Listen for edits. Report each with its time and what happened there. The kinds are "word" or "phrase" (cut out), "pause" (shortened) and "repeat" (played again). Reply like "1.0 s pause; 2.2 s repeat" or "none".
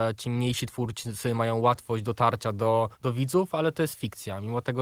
2.9 s pause